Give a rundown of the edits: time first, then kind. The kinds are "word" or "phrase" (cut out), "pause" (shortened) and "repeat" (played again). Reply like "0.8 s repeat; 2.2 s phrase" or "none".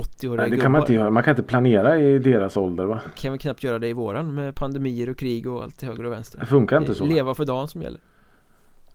none